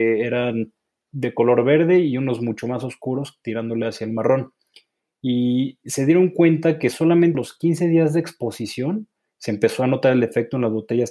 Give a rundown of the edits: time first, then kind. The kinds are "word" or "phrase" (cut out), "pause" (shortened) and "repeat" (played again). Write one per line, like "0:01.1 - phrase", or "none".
0:01.1 - word
0:07.3 - word